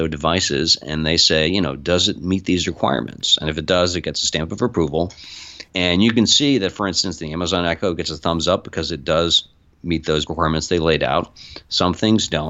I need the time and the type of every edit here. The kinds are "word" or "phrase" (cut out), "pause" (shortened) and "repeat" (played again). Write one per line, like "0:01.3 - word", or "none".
0:05.7 - pause
0:10.3 - word